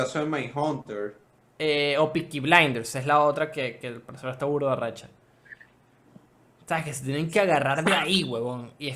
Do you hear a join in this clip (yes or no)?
no